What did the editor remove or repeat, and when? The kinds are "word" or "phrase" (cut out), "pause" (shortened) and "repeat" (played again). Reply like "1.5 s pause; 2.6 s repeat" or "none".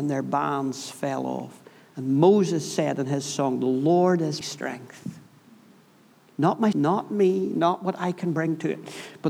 4.4 s word; 6.7 s word